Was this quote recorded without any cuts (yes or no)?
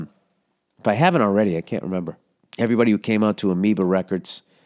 no